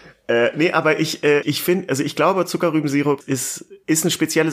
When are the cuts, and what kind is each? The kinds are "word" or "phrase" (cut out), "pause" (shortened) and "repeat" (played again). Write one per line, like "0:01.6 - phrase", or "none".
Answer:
0:01.4 - word
0:03.2 - word